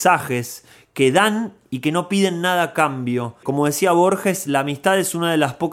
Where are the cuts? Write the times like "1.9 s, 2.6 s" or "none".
none